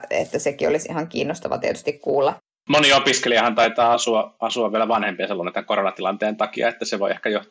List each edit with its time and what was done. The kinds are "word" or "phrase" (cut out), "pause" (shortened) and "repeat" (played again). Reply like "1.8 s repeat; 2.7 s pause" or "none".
none